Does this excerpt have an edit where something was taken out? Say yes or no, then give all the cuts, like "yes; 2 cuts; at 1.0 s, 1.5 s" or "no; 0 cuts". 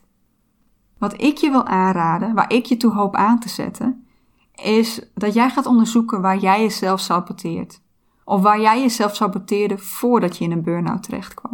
no; 0 cuts